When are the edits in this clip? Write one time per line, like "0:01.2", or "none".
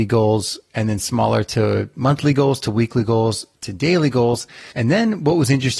0:03.5
0:04.7